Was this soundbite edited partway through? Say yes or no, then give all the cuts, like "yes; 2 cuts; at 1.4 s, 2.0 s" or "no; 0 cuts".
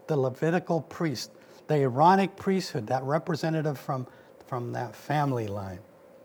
no; 0 cuts